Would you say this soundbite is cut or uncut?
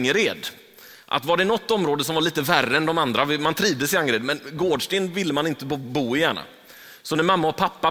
uncut